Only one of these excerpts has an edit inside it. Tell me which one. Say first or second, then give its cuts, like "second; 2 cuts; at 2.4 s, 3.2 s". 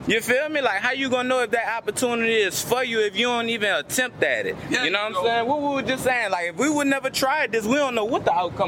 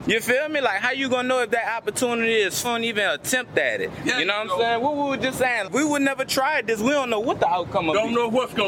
second; 2 cuts; at 2.6 s, 5.6 s